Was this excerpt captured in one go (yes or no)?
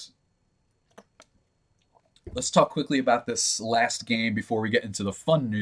yes